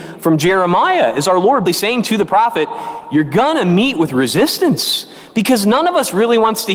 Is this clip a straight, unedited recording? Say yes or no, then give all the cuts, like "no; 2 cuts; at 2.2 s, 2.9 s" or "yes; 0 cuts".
no; 1 cut; at 1.7 s